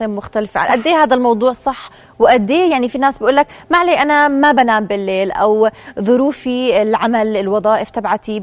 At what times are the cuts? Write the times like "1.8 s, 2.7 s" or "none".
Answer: none